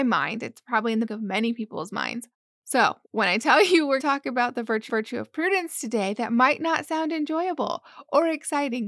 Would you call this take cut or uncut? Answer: cut